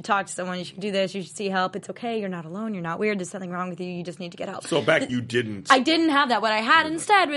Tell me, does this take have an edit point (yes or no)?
yes